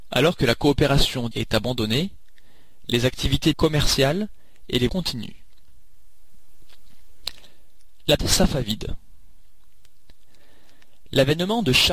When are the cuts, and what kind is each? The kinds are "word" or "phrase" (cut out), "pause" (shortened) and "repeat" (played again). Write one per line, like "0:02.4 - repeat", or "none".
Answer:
0:01.3 - word
0:03.5 - word
0:04.9 - word
0:08.2 - word